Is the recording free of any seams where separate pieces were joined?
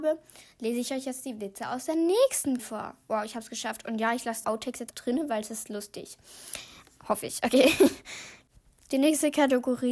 no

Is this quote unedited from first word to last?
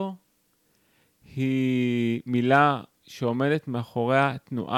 yes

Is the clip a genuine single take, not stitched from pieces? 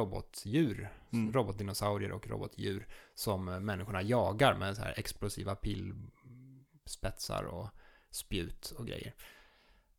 yes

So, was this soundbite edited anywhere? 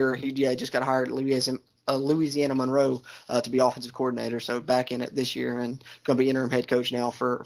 no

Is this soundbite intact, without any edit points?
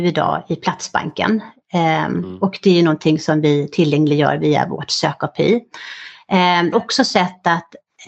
no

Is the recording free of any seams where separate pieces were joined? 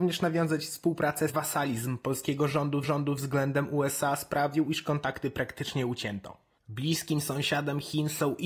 no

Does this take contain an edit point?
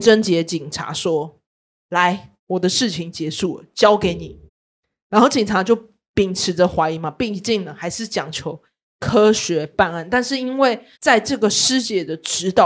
yes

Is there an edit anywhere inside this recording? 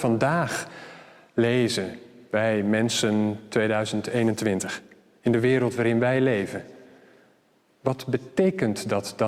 no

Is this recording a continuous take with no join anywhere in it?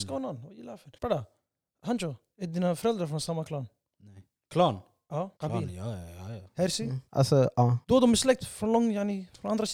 no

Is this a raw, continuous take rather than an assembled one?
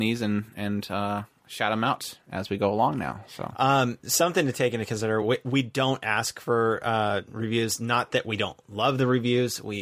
yes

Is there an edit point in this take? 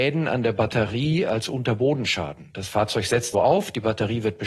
yes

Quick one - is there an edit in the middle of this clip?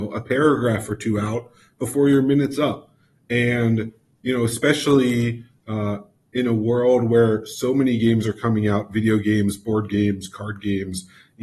no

